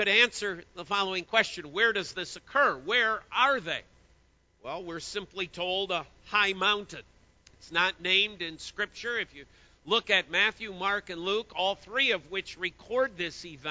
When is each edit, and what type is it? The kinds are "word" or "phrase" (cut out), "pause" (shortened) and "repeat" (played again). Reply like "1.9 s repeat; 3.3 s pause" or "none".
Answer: none